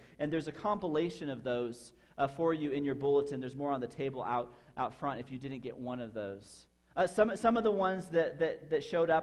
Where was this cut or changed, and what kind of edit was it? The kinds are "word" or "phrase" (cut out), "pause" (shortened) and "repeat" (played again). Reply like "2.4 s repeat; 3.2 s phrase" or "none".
none

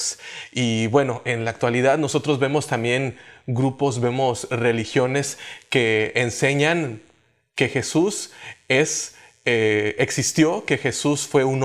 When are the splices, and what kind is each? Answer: none

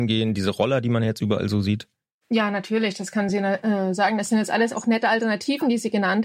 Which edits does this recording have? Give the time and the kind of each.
none

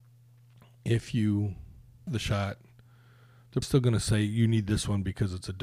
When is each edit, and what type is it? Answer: 2.1 s word; 3.6 s word

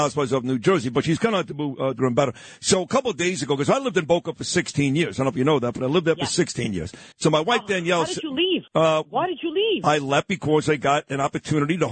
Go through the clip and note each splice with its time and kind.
2.0 s phrase; 7.1 s pause; 8.7 s pause

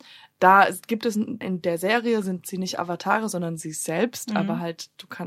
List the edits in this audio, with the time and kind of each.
1.4 s word

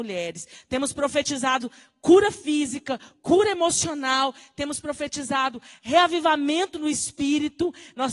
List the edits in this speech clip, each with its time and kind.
none

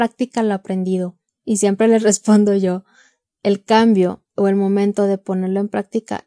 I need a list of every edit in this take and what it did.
1.3 s pause; 4.3 s pause

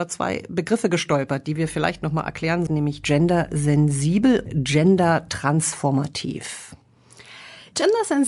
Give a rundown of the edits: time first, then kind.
2.7 s word; 4.5 s word

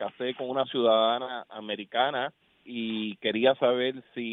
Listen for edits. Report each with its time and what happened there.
2.4 s pause

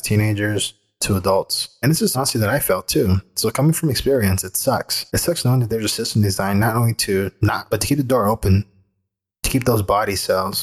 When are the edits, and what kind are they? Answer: 2.1 s word; 5.1 s pause; 7.7 s word

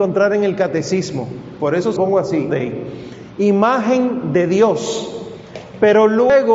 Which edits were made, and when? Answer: 2.0 s word; 2.5 s word

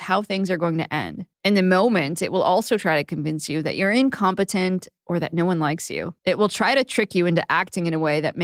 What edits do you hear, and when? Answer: 1.3 s pause; 5.0 s pause; 6.2 s pause

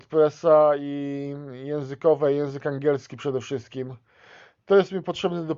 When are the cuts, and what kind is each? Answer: none

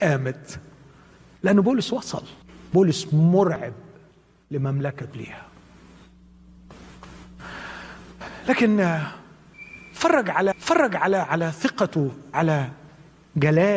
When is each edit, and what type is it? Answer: 2.4 s pause; 5.1 s phrase; 10.5 s repeat; 12.3 s word

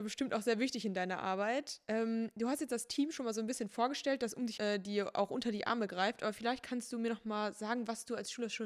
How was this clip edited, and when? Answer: 4.6 s word

